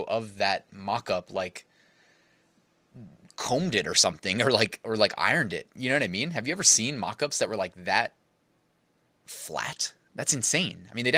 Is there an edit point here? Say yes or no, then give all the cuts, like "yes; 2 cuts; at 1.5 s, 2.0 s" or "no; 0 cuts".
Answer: no; 0 cuts